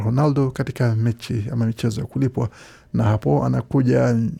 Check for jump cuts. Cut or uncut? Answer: uncut